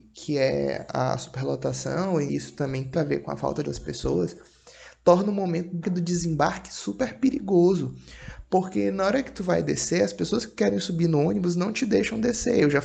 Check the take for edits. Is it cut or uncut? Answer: cut